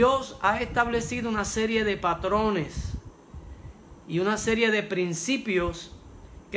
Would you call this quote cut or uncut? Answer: uncut